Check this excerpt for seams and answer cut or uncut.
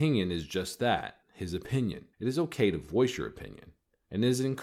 cut